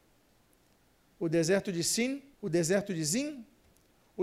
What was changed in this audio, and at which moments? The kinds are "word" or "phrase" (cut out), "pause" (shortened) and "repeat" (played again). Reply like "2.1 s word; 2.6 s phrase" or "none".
2.3 s pause